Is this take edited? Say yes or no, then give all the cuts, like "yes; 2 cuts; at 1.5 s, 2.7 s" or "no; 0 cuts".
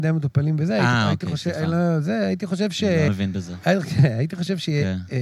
yes; 1 cut; at 3.1 s